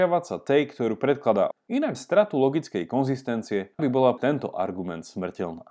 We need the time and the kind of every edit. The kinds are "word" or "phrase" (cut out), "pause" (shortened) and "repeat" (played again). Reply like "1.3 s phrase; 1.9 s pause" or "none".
1.5 s word; 1.9 s word; 3.8 s word; 4.2 s word